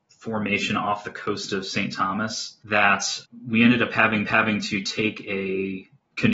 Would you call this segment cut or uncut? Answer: cut